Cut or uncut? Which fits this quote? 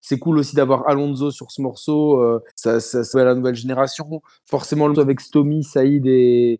cut